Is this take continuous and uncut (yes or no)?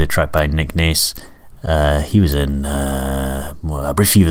yes